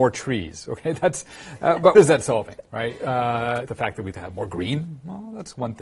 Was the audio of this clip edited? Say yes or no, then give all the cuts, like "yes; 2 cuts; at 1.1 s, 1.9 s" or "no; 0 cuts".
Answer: yes; 3 cuts; at 1.9 s, 3.7 s, 4.1 s